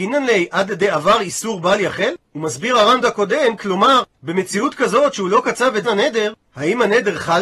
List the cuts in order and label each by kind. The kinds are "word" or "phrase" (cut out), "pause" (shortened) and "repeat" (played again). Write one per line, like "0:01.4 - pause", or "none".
0:03.0 - word
0:05.8 - word